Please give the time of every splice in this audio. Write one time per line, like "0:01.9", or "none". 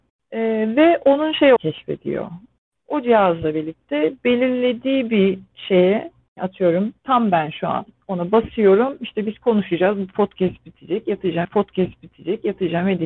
0:01.6
0:06.4
0:07.0
0:11.4